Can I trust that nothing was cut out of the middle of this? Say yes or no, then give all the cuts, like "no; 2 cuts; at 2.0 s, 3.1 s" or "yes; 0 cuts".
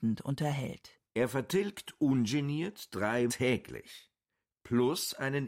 no; 2 cuts; at 1.1 s, 3.3 s